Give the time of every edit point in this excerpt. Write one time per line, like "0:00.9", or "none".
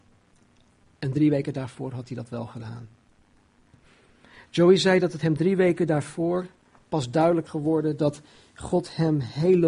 0:06.6
0:07.5